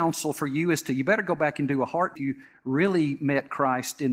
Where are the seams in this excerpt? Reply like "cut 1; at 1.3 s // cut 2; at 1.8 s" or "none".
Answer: cut 1; at 2.2 s